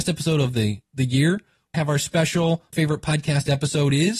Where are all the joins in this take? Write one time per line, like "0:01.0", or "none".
0:01.7
0:02.7